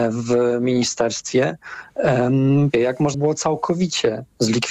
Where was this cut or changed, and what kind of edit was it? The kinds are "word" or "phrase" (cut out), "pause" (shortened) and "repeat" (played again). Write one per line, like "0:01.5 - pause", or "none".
0:02.7 - word
0:03.1 - word